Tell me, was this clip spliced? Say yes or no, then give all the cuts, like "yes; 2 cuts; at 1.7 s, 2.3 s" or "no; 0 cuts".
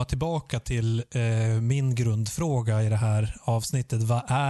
no; 0 cuts